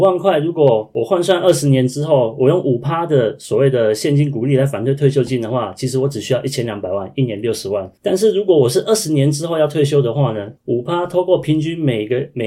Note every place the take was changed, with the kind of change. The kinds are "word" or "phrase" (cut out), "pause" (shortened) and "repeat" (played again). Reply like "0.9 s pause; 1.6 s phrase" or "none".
8.0 s pause; 10.6 s pause